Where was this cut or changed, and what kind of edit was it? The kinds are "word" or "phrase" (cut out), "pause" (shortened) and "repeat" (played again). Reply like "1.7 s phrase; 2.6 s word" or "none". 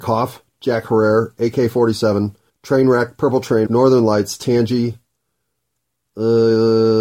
2.5 s pause; 3.7 s word